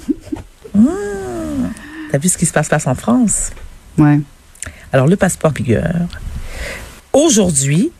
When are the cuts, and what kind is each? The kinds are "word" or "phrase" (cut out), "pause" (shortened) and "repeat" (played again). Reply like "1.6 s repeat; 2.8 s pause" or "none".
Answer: 2.7 s repeat; 5.5 s phrase; 7.0 s pause